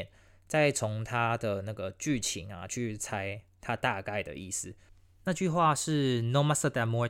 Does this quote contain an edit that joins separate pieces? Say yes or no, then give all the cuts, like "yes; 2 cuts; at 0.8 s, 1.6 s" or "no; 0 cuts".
no; 0 cuts